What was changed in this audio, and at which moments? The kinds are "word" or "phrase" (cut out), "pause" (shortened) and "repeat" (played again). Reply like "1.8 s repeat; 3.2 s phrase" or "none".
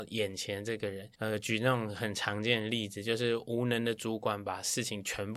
1.1 s pause